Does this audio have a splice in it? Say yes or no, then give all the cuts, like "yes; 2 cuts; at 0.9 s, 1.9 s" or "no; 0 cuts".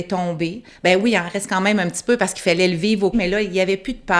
yes; 1 cut; at 3.1 s